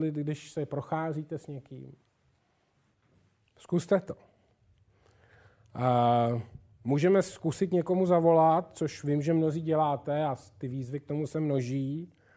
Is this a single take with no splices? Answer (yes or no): yes